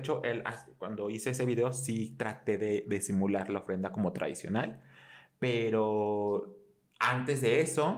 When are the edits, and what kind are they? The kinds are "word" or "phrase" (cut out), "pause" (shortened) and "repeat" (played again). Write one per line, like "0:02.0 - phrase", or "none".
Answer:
none